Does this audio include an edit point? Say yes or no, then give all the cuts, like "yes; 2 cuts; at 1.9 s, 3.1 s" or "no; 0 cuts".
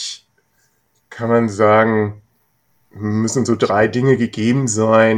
no; 0 cuts